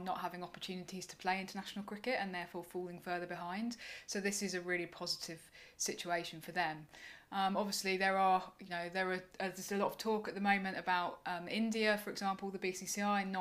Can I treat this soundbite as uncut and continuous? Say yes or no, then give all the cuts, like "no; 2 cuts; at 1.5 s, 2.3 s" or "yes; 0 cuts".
yes; 0 cuts